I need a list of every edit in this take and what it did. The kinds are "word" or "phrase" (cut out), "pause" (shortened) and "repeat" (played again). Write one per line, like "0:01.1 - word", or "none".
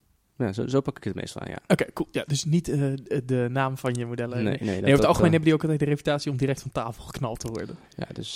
none